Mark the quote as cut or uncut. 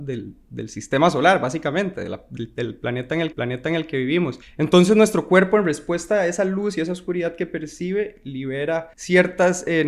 cut